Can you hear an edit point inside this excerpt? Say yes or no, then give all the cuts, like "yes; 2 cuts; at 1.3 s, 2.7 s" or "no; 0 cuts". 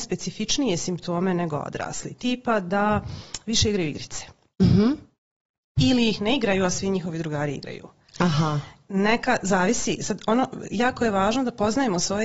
no; 0 cuts